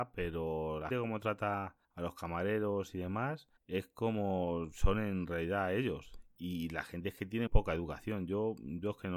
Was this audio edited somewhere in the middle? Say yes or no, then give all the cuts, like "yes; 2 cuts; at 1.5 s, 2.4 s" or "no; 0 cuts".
yes; 4 cuts; at 0.9 s, 1.8 s, 3.6 s, 7.5 s